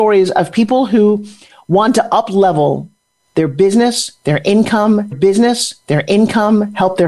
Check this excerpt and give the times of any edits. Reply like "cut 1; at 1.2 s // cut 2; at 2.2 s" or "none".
cut 1; at 5.1 s